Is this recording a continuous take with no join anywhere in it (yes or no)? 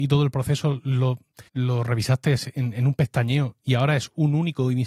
no